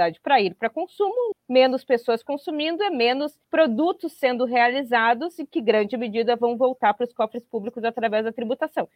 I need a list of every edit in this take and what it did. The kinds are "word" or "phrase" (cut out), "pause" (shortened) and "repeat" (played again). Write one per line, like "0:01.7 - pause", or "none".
0:01.3 - word
0:03.4 - pause